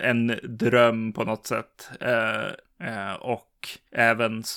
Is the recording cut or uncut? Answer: uncut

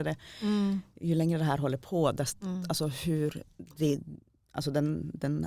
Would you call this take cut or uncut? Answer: uncut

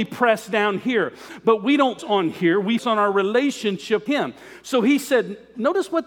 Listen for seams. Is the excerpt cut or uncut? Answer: cut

